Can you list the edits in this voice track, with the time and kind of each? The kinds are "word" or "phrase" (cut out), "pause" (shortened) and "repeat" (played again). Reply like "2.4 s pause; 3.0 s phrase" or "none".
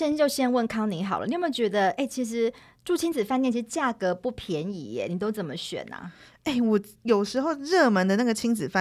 none